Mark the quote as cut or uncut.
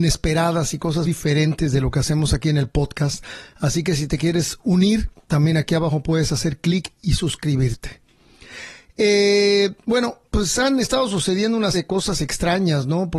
cut